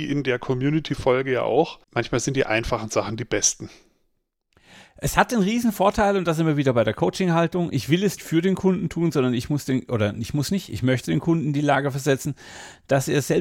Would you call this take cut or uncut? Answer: cut